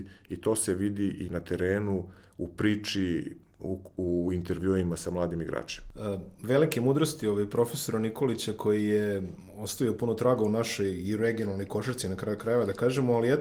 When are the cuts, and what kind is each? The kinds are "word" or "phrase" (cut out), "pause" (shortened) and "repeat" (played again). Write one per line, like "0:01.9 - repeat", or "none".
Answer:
none